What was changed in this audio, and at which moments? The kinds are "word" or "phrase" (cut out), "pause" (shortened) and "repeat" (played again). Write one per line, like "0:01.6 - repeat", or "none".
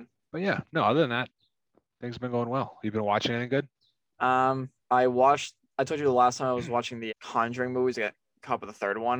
0:04.8 - pause
0:07.1 - word